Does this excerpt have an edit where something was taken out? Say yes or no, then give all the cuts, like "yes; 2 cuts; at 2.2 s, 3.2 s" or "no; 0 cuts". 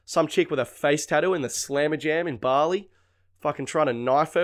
no; 0 cuts